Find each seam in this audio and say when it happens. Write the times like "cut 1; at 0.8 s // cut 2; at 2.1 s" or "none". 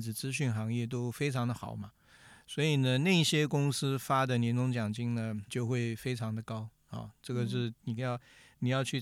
cut 1; at 5.5 s